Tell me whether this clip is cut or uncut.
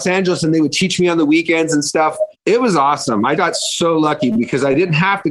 cut